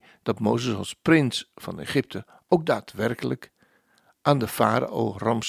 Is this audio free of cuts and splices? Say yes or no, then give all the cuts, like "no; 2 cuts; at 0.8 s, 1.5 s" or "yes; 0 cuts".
yes; 0 cuts